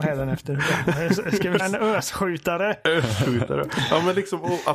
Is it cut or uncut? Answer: cut